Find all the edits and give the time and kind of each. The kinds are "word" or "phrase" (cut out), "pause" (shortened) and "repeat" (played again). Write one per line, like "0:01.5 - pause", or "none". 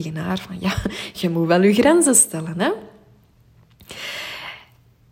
none